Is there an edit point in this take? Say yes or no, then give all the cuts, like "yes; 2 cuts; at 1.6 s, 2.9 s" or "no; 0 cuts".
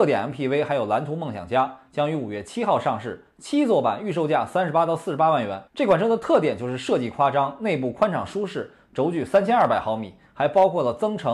yes; 1 cut; at 5.7 s